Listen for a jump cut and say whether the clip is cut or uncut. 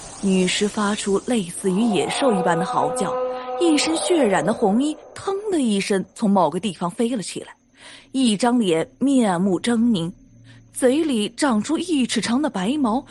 uncut